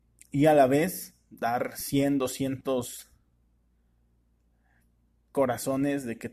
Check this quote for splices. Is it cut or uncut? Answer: uncut